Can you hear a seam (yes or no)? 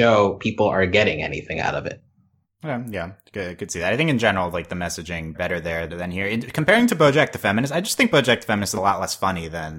yes